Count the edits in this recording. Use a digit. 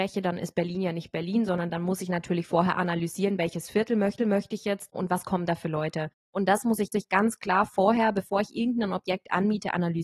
2